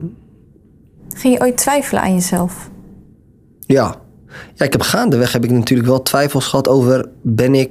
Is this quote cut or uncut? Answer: uncut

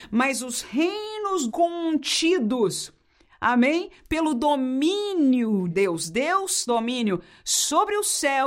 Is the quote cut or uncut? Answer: cut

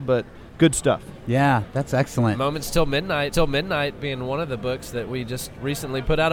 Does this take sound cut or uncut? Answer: cut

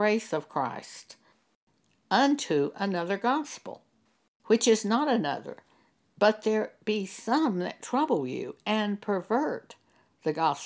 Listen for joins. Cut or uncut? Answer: uncut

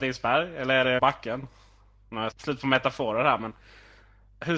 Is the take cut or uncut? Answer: cut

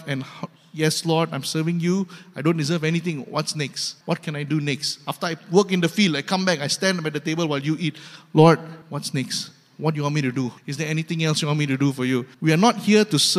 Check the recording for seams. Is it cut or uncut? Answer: cut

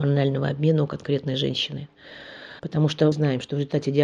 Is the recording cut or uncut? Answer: cut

